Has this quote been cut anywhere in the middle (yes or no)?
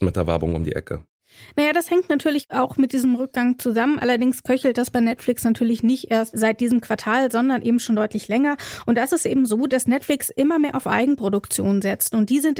no